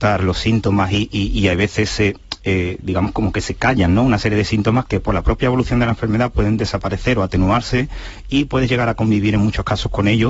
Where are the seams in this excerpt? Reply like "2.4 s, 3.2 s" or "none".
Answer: 4.9 s